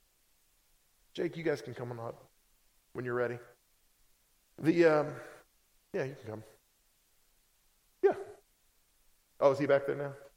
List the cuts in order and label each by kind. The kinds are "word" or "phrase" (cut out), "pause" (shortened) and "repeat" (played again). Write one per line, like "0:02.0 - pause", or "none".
none